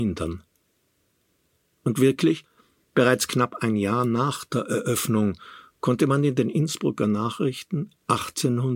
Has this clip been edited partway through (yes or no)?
no